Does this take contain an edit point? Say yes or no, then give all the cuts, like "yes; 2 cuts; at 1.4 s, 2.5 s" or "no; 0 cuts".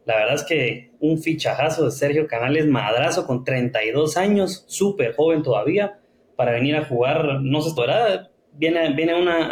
yes; 1 cut; at 7.8 s